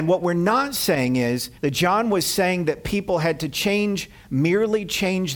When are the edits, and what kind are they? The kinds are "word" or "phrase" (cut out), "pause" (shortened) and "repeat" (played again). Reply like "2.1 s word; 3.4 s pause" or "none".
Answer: 1.6 s pause